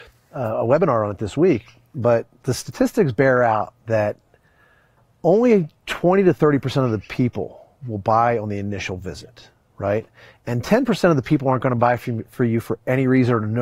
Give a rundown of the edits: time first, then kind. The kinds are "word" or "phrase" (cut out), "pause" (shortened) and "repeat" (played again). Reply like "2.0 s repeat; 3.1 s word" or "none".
none